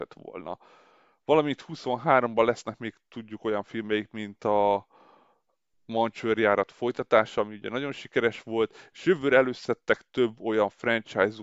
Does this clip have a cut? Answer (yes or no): no